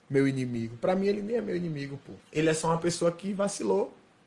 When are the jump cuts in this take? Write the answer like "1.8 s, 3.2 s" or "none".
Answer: 2.2 s